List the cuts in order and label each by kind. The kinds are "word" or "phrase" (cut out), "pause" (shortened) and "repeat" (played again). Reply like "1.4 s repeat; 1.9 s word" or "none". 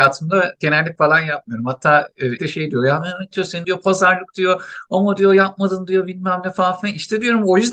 1.0 s word; 2.4 s word; 3.6 s word